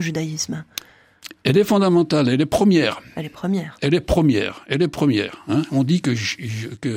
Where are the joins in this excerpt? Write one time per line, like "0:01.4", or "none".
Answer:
none